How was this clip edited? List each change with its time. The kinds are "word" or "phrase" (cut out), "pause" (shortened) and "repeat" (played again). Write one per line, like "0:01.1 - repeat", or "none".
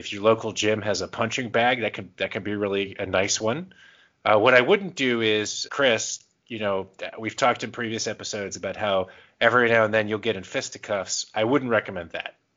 0:05.7 - word